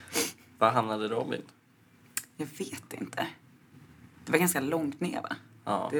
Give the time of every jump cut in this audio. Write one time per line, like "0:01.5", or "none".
none